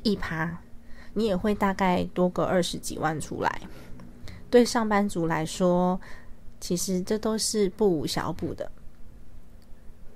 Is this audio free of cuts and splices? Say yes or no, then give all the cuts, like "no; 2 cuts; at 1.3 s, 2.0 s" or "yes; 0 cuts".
no; 1 cut; at 1.1 s